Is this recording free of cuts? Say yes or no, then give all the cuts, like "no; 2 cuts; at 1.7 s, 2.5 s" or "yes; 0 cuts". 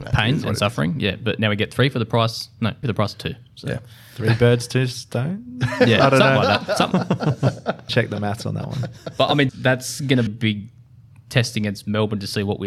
no; 5 cuts; at 2.8 s, 6.9 s, 7.9 s, 9.5 s, 10.3 s